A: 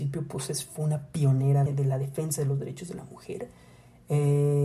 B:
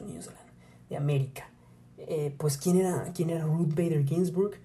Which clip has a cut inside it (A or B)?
A